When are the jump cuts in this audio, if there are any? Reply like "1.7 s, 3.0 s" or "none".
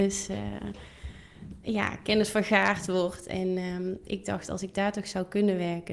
none